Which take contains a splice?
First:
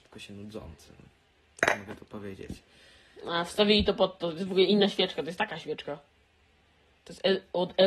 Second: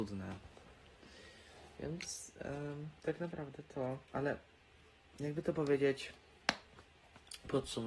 second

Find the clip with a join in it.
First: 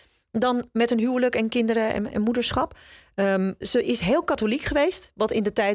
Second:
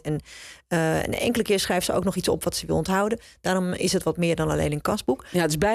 first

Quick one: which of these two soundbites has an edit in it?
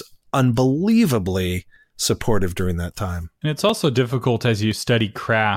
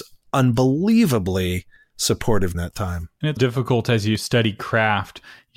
second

